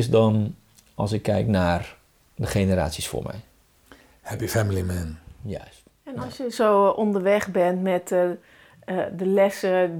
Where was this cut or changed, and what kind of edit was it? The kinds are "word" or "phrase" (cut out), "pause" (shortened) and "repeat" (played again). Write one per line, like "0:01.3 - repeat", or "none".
none